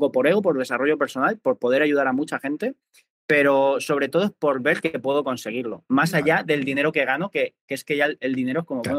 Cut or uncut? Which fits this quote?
uncut